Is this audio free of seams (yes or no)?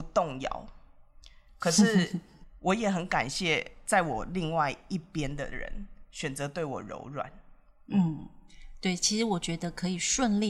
yes